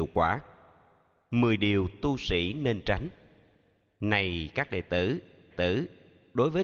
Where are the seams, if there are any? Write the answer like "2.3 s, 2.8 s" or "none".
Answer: 5.5 s